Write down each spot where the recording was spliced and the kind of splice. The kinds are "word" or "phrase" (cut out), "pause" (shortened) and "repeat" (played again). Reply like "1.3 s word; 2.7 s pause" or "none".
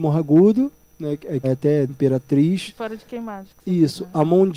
1.4 s word; 1.9 s word